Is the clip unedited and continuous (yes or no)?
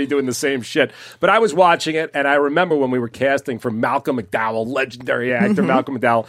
yes